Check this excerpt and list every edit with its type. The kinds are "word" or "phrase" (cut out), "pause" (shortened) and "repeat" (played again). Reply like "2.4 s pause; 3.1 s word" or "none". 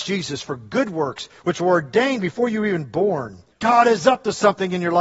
3.5 s pause